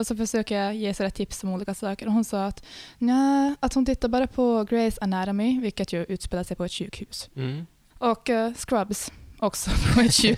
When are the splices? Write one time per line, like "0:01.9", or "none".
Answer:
none